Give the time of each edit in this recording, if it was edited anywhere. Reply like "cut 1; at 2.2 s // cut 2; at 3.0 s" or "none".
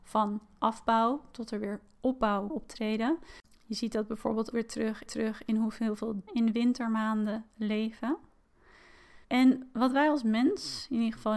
cut 1; at 2.5 s // cut 2; at 4.5 s // cut 3; at 5.1 s // cut 4; at 6.3 s // cut 5; at 9.2 s